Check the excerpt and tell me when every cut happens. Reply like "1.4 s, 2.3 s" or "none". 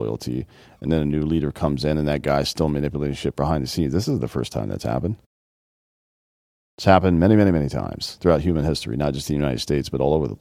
none